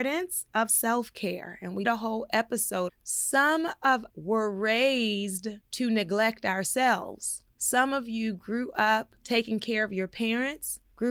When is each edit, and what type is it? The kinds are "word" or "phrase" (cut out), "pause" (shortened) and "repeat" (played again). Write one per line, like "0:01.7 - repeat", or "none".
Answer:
0:01.8 - word
0:02.9 - phrase
0:04.1 - word

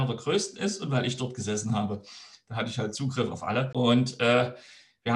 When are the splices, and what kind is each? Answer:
none

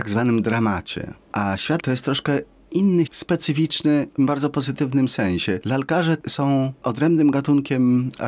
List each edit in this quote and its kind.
0:01.8 - word
0:03.1 - word
0:04.2 - word

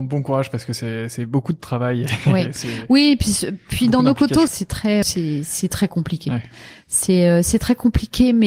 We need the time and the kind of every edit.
0:04.5 - phrase
0:05.0 - word

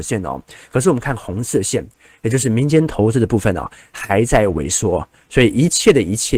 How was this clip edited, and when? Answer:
none

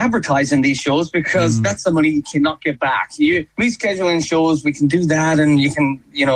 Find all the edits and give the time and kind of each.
0:03.5 - pause

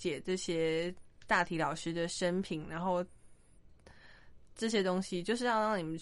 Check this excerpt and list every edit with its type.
0:02.6 - phrase

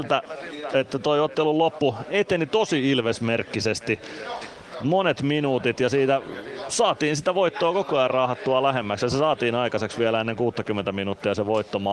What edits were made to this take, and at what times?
none

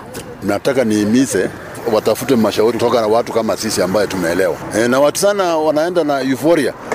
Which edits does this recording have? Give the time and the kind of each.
0:05.2 - phrase

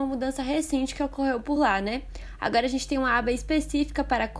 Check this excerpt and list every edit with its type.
none

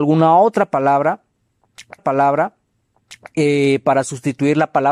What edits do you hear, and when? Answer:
0:02.0 - repeat

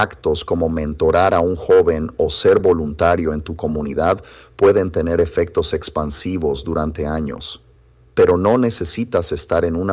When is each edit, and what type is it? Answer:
none

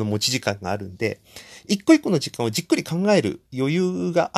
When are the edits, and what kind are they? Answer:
0:03.5 - pause

